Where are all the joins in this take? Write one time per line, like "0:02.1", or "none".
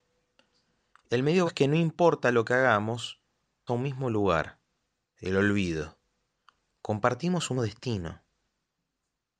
0:01.5
0:03.7
0:07.6